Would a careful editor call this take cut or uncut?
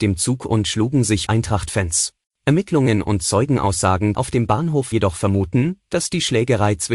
cut